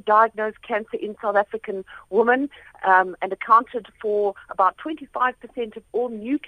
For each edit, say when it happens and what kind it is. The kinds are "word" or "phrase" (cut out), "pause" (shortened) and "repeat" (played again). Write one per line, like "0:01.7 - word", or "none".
none